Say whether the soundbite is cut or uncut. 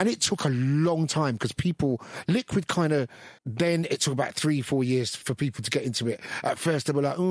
cut